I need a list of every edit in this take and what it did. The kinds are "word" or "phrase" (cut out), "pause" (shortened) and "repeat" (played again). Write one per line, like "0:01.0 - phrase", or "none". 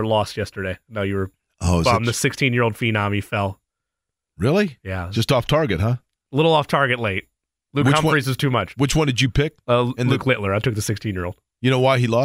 none